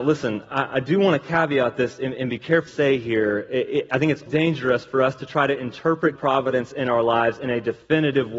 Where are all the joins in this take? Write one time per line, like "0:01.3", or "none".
0:02.7
0:04.3
0:06.2